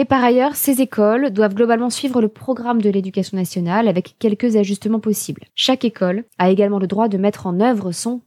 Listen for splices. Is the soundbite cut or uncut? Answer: cut